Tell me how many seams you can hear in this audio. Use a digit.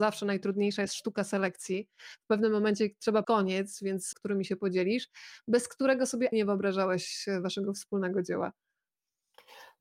3